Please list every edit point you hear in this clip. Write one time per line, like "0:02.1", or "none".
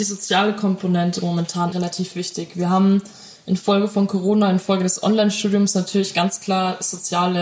0:01.7

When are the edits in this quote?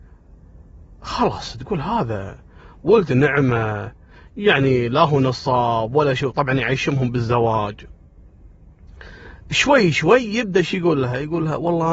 none

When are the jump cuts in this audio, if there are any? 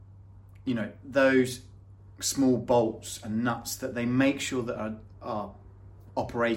none

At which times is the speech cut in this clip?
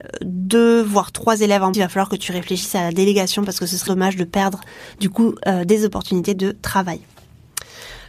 0:01.7
0:03.9

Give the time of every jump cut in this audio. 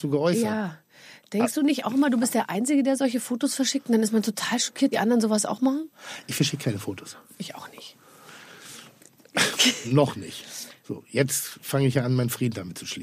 0:04.9
0:09.8

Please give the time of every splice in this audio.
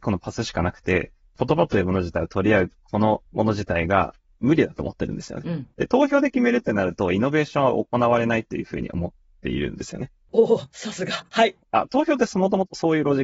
0:03.3
0:11.6

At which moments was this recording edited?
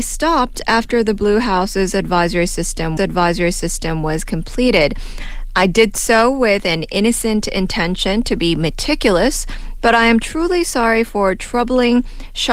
0:03.0

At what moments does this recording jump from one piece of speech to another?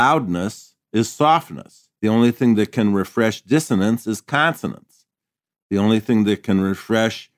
0:02.0

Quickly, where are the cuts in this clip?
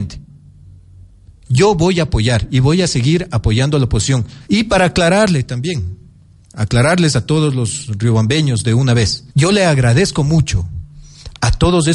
0:04.4
0:09.3

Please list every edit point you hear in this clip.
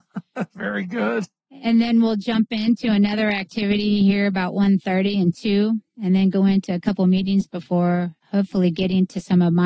0:08.2

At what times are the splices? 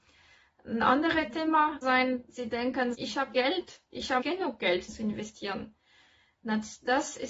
0:01.8
0:02.9
0:03.3
0:04.2
0:04.9

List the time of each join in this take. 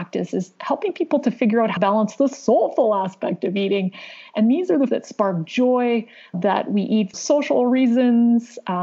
0:01.8
0:04.9
0:06.3
0:07.1

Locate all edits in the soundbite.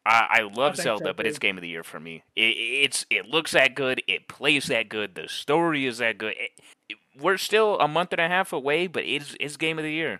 0:06.7

